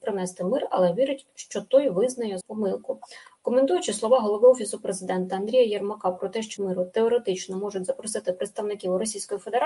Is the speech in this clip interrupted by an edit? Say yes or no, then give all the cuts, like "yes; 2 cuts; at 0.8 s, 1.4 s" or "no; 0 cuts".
yes; 2 cuts; at 2.4 s, 6.6 s